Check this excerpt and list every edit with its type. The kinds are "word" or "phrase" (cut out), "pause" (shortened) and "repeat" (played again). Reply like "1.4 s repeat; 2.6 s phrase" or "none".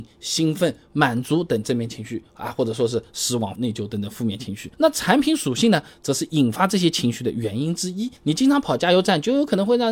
3.6 s phrase; 4.7 s pause; 8.2 s pause